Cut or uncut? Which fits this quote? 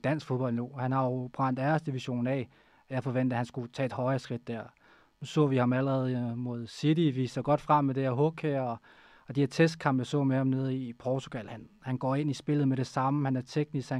uncut